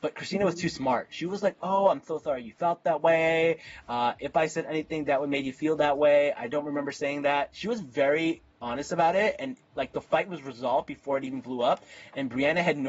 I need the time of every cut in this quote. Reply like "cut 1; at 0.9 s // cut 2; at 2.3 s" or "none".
cut 1; at 8.5 s